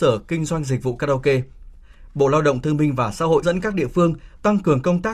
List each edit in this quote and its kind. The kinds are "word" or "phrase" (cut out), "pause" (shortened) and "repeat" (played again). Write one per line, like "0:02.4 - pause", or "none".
0:03.4 - word